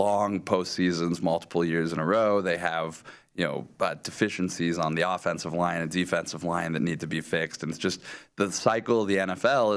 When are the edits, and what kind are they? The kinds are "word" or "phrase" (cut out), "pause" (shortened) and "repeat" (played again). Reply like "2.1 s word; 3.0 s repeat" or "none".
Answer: none